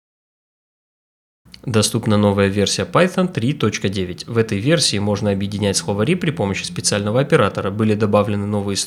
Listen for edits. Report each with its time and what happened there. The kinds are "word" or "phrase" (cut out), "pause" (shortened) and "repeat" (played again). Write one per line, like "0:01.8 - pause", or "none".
none